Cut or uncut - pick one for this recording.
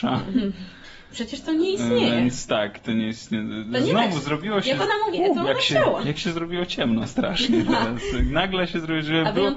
cut